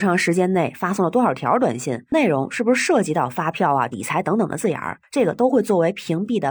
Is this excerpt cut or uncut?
cut